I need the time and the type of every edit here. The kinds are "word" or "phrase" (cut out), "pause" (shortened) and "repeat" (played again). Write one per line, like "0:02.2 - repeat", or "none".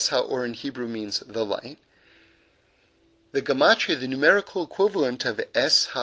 none